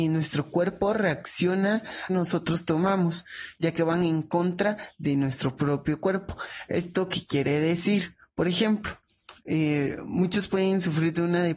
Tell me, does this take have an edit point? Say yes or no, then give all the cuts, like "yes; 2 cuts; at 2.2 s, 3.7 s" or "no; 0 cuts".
yes; 1 cut; at 2.1 s